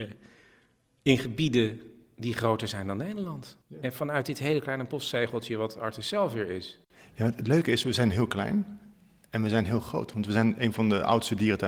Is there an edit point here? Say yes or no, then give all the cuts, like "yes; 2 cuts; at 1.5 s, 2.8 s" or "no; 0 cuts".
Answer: yes; 1 cut; at 3.6 s